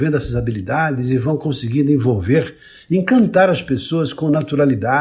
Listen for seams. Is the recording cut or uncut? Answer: uncut